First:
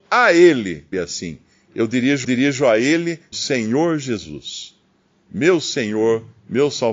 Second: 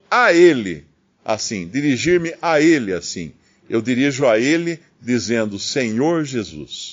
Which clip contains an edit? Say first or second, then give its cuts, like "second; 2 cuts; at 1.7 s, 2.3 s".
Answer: first; 3 cuts; at 0.9 s, 2.2 s, 3.3 s